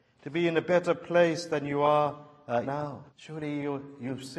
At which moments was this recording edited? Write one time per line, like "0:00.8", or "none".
0:02.6
0:03.1